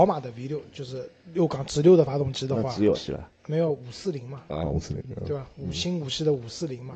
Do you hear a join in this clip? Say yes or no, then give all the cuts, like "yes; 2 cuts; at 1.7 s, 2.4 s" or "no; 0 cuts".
yes; 2 cuts; at 2.9 s, 3.4 s